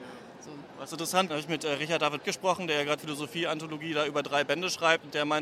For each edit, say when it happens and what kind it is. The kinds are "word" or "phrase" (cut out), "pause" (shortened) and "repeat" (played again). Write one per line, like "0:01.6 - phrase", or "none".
0:01.3 - word
0:02.2 - word
0:03.0 - word